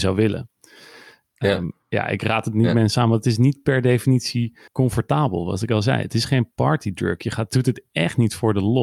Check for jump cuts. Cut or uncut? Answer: cut